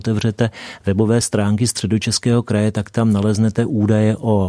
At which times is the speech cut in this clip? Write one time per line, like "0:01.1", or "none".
none